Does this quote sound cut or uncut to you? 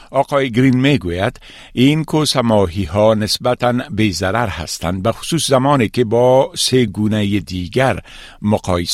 uncut